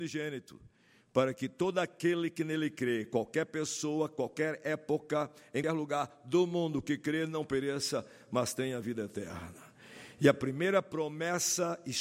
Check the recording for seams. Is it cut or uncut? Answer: cut